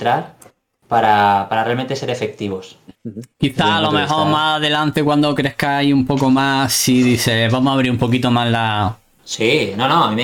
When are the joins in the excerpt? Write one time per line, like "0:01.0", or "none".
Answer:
0:02.9
0:03.3

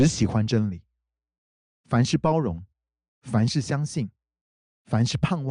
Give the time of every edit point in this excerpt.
none

